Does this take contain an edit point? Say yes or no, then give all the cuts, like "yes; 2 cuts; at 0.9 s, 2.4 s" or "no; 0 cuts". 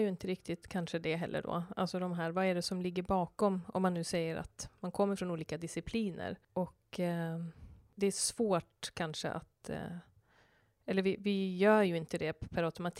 no; 0 cuts